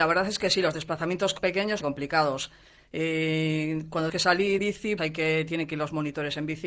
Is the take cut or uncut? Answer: cut